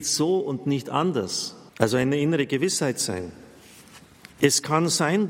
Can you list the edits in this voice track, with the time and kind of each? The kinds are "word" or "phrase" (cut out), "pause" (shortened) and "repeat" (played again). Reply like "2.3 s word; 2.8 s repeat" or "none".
1.7 s pause; 4.3 s pause